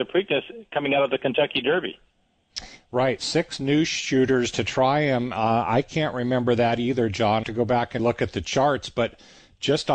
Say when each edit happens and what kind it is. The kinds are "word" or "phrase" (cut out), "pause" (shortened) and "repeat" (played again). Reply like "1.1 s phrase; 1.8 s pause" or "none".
7.4 s phrase; 8.0 s word